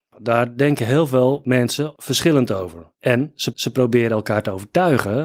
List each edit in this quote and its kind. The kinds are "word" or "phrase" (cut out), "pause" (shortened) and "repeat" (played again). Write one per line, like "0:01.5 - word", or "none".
0:03.5 - repeat